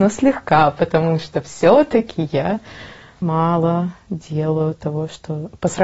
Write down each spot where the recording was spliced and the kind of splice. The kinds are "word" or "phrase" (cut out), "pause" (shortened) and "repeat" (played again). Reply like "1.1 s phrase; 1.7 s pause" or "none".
3.2 s word